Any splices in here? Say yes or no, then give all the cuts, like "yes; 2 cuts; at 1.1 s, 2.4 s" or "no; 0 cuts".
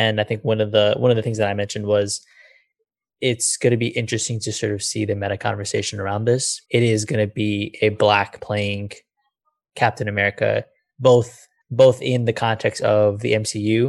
yes; 3 cuts; at 6.7 s, 8.4 s, 11.6 s